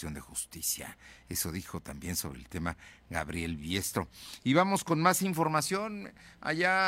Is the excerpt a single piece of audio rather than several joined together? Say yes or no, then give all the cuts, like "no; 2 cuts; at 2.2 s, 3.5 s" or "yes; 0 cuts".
yes; 0 cuts